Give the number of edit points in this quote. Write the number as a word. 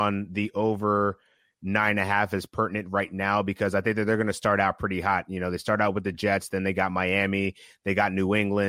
zero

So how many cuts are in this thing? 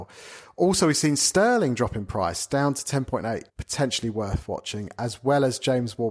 one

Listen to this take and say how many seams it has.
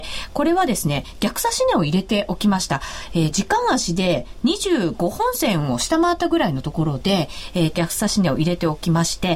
two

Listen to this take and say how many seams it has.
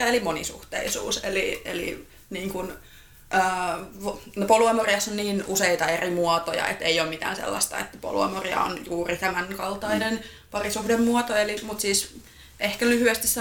zero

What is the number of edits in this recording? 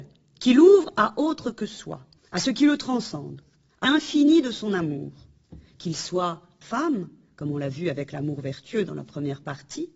three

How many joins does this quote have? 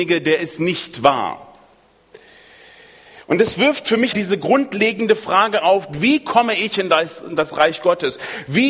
one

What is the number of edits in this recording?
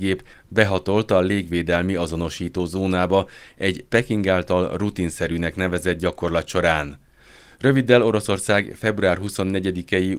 zero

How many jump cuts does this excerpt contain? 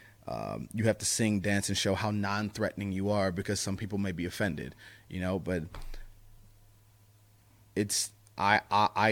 zero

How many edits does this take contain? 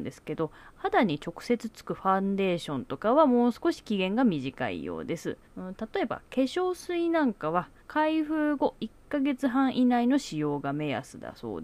two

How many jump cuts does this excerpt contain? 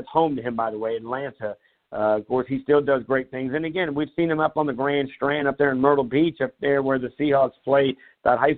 zero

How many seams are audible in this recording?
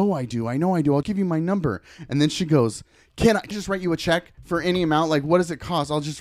two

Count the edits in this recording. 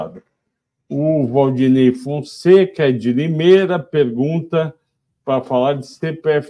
zero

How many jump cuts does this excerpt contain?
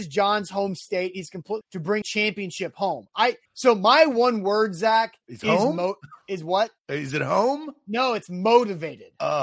six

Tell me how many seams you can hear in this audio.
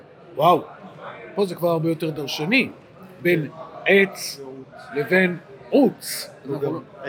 zero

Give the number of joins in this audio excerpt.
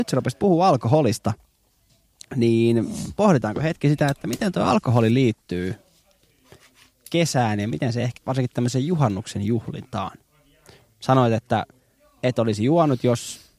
one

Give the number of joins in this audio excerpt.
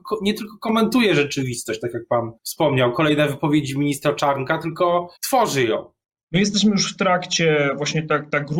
three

